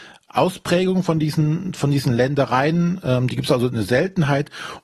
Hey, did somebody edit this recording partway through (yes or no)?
no